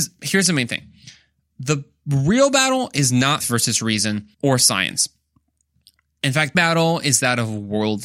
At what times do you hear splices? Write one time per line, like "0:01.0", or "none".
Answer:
0:03.4
0:04.3
0:06.5

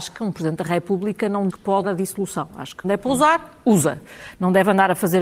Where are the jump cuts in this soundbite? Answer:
0:01.5
0:01.8
0:02.8

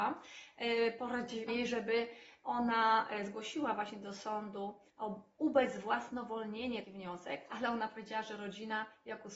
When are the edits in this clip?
0:01.5
0:04.9
0:06.8

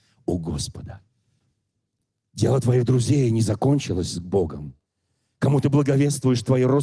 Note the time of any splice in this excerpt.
none

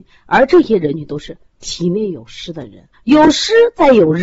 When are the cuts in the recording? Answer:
0:02.9

